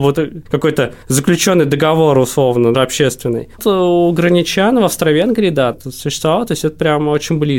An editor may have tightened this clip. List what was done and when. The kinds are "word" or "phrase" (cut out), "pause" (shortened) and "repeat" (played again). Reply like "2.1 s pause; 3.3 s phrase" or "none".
2.7 s word; 3.6 s word; 5.7 s word